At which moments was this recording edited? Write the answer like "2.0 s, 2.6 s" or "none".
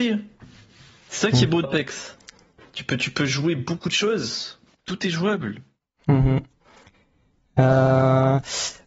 1.6 s, 4.7 s